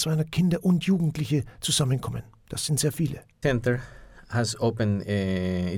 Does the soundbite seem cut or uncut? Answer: cut